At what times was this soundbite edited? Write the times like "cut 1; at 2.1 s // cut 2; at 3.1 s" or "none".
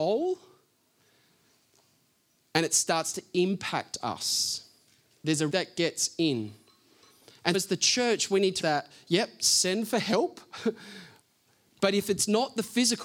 cut 1; at 5.5 s // cut 2; at 7.5 s // cut 3; at 8.6 s